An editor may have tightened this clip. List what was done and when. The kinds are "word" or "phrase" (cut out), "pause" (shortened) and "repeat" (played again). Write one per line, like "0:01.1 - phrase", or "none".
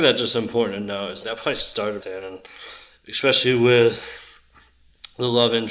0:01.2 - word
0:02.0 - word